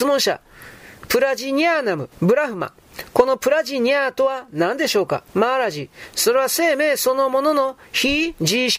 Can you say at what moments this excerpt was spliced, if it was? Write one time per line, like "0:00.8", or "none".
0:02.1
0:05.3